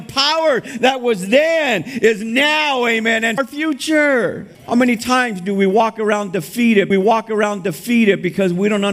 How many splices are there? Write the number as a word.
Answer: three